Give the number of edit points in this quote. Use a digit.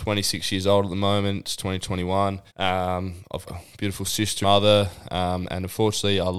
3